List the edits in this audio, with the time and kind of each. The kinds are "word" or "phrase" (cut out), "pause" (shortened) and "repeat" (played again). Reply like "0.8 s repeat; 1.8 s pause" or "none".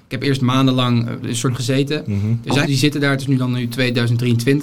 1.2 s word; 1.5 s word; 2.6 s word